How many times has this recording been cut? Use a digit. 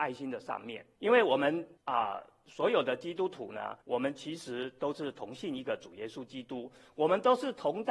3